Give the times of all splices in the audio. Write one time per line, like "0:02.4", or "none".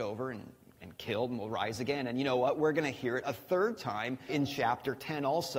0:04.3